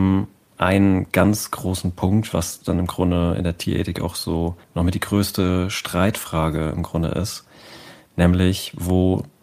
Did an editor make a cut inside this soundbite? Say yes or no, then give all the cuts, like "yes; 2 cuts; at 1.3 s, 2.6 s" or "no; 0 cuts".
yes; 1 cut; at 4.6 s